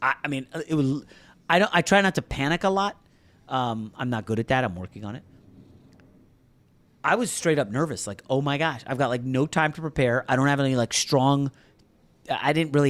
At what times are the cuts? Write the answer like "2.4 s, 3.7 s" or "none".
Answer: none